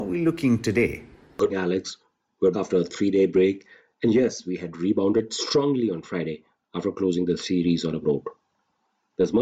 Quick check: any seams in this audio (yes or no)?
yes